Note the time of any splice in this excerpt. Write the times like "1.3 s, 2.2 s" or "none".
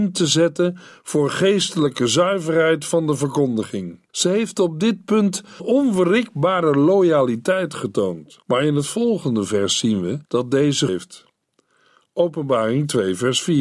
4.1 s, 5.6 s, 8.4 s, 10.2 s, 10.9 s